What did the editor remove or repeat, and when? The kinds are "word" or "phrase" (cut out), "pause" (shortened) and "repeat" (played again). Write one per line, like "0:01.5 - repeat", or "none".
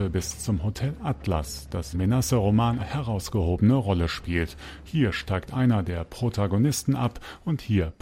0:01.9 - word
0:02.8 - word

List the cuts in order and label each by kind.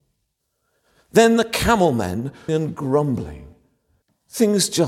0:02.5 - word

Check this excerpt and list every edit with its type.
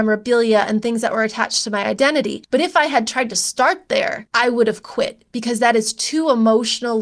none

